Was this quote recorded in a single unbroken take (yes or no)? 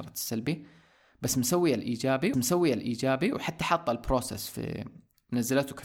no